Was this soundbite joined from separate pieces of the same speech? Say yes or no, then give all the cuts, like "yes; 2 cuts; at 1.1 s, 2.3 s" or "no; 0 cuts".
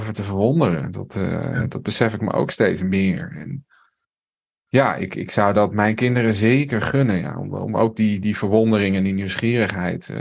no; 0 cuts